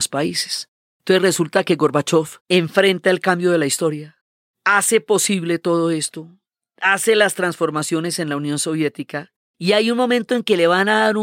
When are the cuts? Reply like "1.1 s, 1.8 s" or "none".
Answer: 2.4 s